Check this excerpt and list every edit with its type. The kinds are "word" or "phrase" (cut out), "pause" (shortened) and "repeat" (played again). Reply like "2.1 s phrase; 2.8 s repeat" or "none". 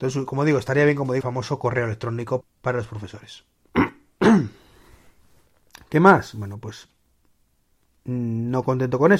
1.2 s word; 2.4 s word